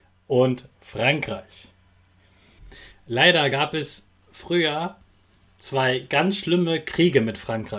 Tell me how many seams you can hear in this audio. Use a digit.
0